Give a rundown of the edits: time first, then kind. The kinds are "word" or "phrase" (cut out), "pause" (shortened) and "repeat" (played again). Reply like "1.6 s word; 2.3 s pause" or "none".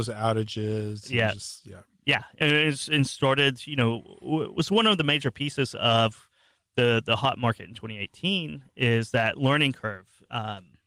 none